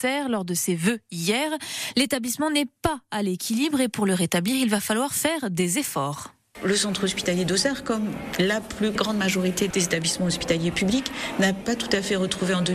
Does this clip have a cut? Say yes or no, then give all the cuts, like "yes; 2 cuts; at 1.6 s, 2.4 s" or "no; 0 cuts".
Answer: no; 0 cuts